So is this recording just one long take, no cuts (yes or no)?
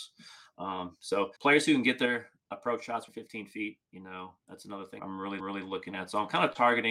no